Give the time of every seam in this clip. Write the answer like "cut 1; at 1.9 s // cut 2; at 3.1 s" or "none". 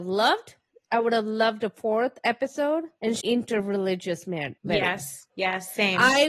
cut 1; at 3.2 s // cut 2; at 5.3 s

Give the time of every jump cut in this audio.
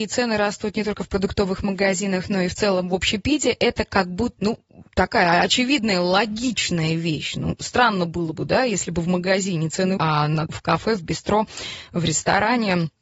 cut 1; at 4.4 s // cut 2; at 4.9 s // cut 3; at 10.0 s // cut 4; at 10.5 s

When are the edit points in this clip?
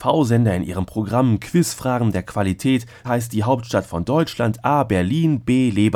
cut 1; at 3.0 s

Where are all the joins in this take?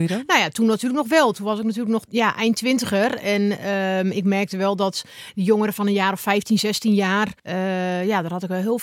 cut 1; at 2.1 s // cut 2; at 7.4 s

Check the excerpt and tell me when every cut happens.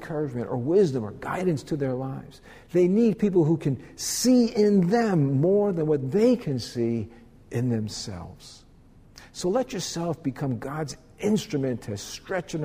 none

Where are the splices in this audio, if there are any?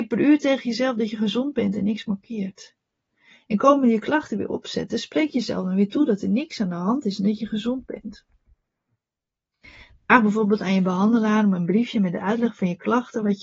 none

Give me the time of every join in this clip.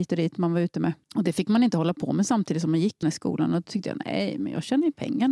cut 1; at 1.0 s // cut 2; at 3.0 s

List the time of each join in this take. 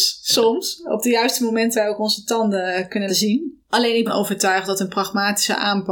cut 1; at 1.7 s // cut 2; at 3.1 s // cut 3; at 4.1 s

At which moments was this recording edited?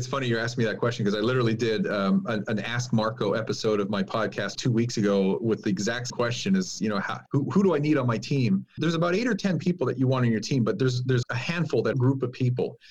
cut 1; at 4.5 s // cut 2; at 6.1 s // cut 3; at 7.3 s // cut 4; at 8.8 s // cut 5; at 11.2 s // cut 6; at 11.9 s

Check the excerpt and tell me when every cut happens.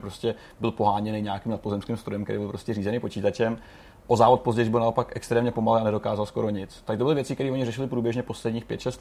none

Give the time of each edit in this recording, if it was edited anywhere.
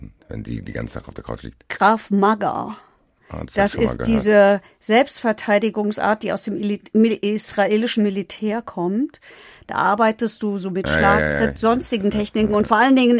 none

